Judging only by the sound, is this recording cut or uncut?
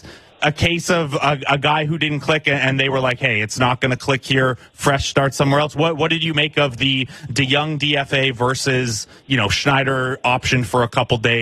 uncut